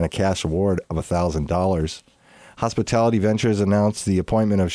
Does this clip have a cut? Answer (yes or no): no